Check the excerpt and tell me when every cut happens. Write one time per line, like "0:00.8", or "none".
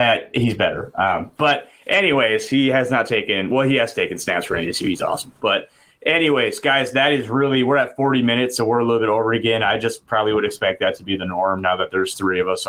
none